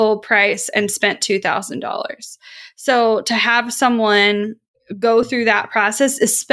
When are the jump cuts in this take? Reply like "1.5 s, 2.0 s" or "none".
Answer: none